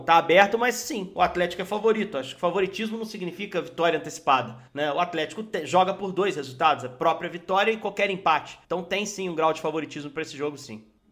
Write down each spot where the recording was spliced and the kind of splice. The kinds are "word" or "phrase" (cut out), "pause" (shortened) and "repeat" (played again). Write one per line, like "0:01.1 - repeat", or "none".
0:04.7 - pause
0:08.6 - pause